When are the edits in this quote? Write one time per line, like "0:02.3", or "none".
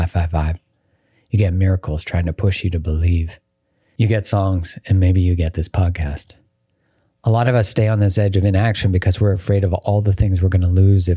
none